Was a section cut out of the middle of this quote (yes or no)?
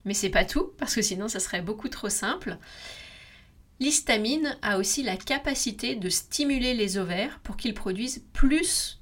no